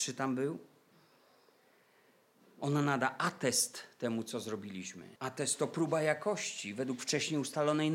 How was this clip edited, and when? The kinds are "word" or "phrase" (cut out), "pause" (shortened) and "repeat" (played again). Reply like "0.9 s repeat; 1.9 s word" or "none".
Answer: 5.2 s pause